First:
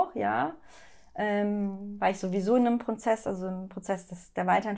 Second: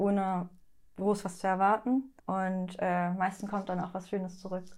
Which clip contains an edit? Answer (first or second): second